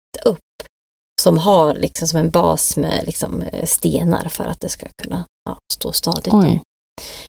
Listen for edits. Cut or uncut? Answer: uncut